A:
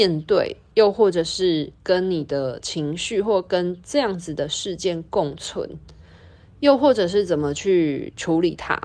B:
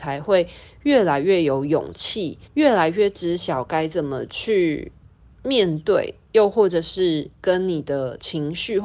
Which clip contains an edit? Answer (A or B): B